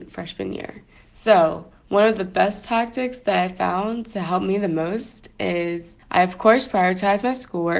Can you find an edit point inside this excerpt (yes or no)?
yes